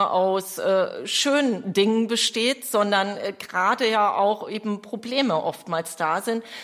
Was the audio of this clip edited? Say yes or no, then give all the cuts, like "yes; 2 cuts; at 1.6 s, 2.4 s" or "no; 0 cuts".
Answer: no; 0 cuts